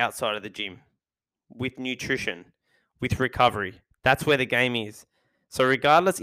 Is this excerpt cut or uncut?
uncut